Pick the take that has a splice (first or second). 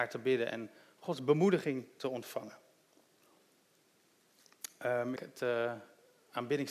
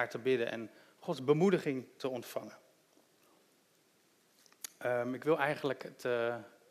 first